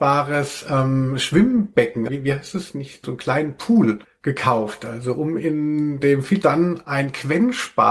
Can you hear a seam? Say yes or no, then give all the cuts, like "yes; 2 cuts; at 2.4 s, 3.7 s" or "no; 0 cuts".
yes; 4 cuts; at 2.1 s, 3.0 s, 4.0 s, 6.4 s